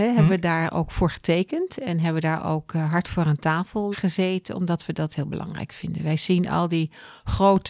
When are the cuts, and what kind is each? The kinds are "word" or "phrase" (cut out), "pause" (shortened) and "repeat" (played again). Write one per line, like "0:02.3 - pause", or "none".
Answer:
0:03.9 - word
0:05.1 - word